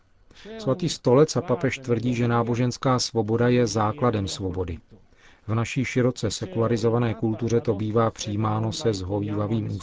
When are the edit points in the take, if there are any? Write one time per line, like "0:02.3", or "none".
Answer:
none